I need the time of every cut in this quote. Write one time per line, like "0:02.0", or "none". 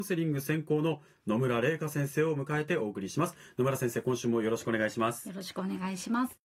none